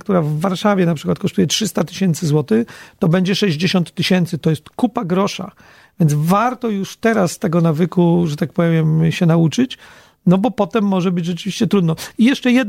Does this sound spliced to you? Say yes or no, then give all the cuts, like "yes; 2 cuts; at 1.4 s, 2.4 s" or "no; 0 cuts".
no; 0 cuts